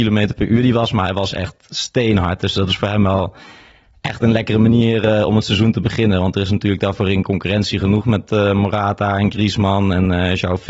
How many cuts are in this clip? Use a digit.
0